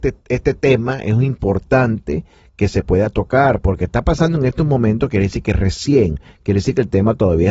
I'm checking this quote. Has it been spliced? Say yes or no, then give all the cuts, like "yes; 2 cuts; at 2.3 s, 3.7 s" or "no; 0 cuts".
no; 0 cuts